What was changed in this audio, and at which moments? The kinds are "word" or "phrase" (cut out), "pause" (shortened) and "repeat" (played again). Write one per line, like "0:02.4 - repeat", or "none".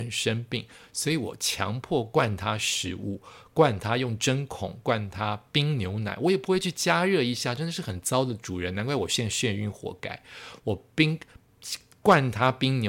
none